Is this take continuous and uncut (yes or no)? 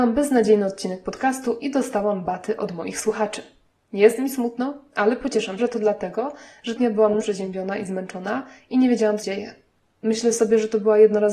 no